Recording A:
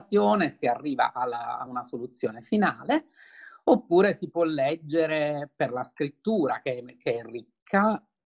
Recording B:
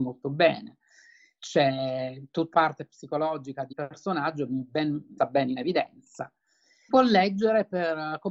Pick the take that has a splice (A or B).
B